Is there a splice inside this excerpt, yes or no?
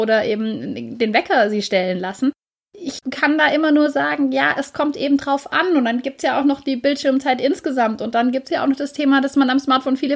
no